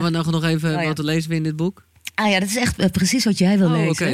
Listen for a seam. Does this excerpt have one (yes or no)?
no